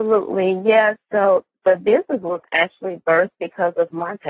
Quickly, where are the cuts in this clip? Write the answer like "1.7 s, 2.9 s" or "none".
none